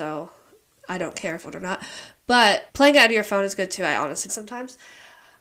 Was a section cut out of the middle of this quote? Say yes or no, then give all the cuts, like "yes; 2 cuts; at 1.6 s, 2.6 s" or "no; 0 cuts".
yes; 3 cuts; at 1.4 s, 2.7 s, 4.3 s